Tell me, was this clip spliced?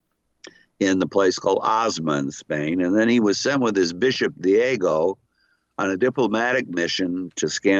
no; 0 cuts

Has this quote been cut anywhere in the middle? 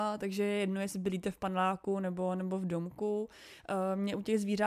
no; 0 cuts

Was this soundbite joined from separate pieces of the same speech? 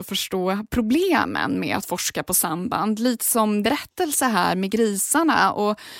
yes; 1 cut; at 3.6 s

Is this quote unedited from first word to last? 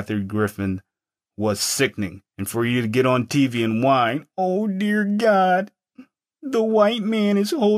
no; 1 cut; at 2.3 s

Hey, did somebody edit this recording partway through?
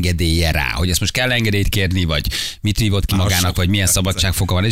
no; 0 cuts

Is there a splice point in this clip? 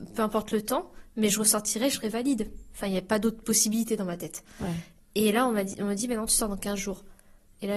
no; 0 cuts

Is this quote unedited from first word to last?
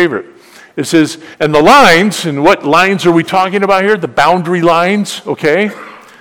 no; 1 cut; at 1.3 s

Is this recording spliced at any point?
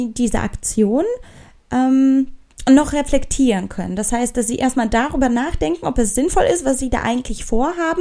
no; 0 cuts

